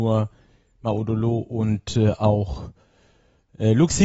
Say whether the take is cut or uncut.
uncut